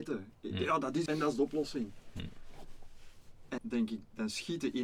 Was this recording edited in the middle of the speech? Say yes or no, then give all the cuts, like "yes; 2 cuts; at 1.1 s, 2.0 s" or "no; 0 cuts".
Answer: yes; 2 cuts; at 1.1 s, 3.6 s